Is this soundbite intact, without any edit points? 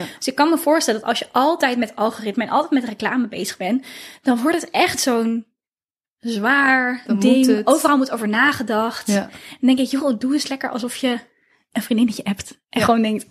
yes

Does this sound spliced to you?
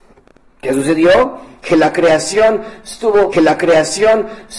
yes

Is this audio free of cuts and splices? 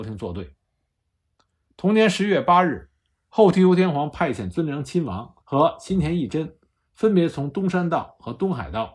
no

